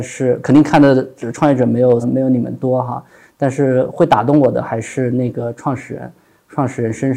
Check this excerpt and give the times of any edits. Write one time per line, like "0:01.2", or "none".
0:02.0